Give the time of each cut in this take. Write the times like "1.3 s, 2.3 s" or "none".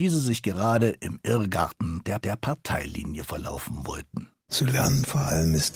2.2 s

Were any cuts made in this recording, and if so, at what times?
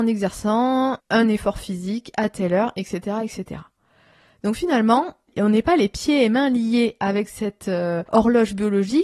none

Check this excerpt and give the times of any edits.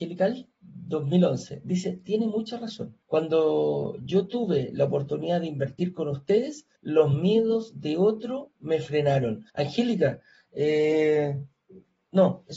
3.0 s, 6.8 s, 9.5 s

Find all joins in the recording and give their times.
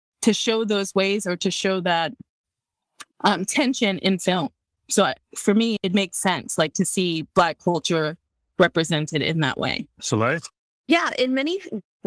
3.1 s, 5.2 s, 9.9 s

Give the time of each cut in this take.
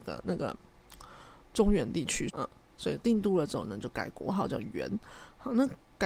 2.3 s

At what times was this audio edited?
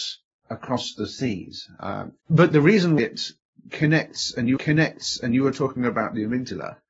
2.2 s, 3.0 s, 4.6 s

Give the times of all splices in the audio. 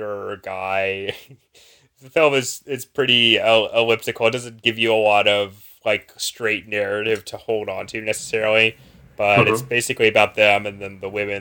none

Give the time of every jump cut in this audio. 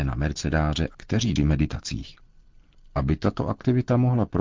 0.9 s, 1.4 s

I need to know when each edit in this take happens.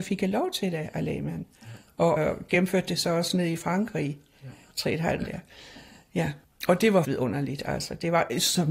2.2 s, 5.2 s, 6.4 s, 7.0 s

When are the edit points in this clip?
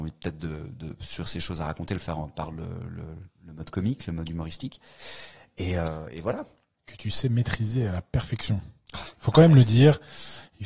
none

